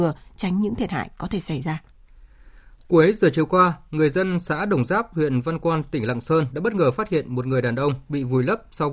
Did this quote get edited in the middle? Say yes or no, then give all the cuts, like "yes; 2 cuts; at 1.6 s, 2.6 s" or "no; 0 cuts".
no; 0 cuts